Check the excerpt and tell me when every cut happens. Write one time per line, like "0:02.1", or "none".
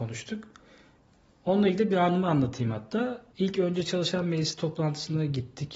0:03.3